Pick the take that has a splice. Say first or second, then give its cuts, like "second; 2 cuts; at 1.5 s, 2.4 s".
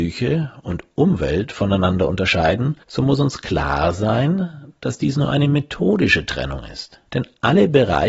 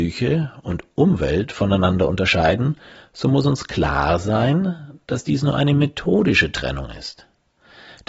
first; 2 cuts; at 2.8 s, 7.1 s